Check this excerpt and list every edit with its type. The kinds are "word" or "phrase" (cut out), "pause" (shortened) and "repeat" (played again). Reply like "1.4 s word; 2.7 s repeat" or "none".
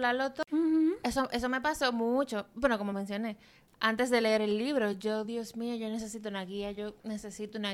none